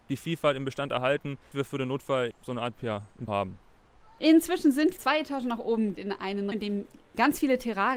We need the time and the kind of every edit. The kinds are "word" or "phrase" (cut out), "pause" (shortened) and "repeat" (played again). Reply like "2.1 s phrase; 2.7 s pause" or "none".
1.5 s word; 2.3 s word; 2.7 s word; 3.3 s word; 5.0 s word; 5.9 s word; 6.5 s word

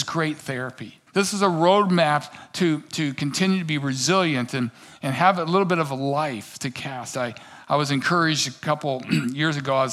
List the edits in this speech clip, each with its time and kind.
1.1 s pause

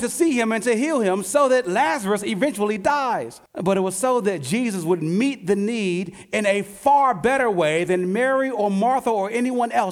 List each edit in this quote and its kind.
3.5 s pause

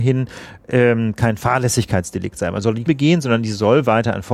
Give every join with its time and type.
2.9 s phrase

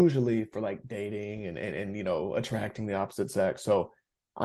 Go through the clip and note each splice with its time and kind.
none

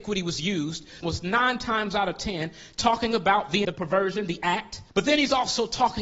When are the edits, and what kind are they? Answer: 1.0 s phrase; 3.6 s word; 4.9 s pause

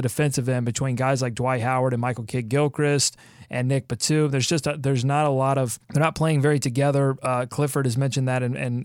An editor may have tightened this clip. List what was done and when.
5.8 s pause

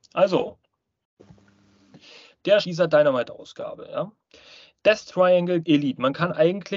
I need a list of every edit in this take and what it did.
2.6 s word; 5.6 s word

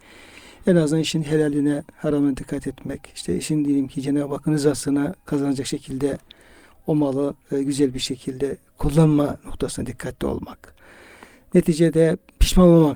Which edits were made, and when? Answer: none

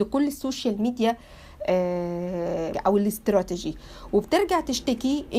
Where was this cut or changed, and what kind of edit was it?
2.7 s word

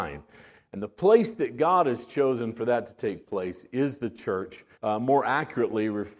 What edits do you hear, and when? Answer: 4.7 s pause

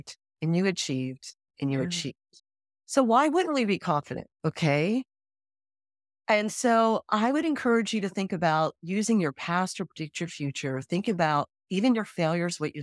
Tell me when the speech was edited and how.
2.4 s pause; 4.3 s pause

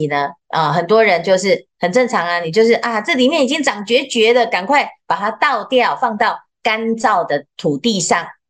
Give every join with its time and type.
none

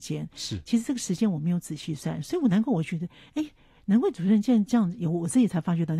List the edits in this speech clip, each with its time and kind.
none

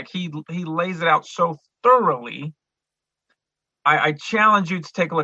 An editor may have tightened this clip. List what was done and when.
none

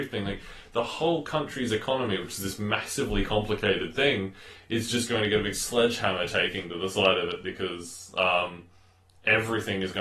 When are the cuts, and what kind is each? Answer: none

